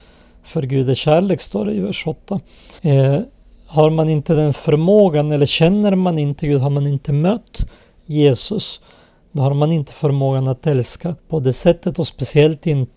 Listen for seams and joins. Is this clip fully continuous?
no; 2 cuts; at 2.8 s, 11.2 s

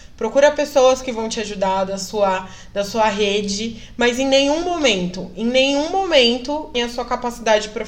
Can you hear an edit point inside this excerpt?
yes; 1 cut; at 6.7 s

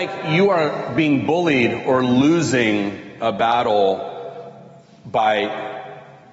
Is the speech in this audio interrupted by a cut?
no; 0 cuts

